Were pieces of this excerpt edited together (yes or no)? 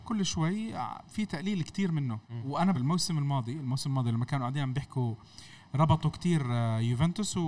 yes